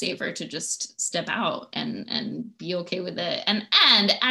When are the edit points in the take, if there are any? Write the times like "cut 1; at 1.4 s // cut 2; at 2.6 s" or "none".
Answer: none